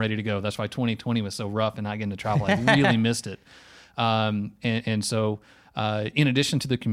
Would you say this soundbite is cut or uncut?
uncut